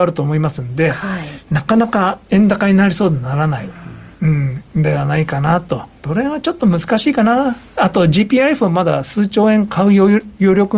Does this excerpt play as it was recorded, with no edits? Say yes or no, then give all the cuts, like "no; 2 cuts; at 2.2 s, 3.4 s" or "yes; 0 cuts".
no; 1 cut; at 5.9 s